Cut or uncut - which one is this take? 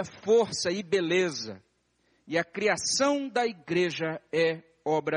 uncut